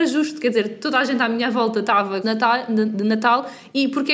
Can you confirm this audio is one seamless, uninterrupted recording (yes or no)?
no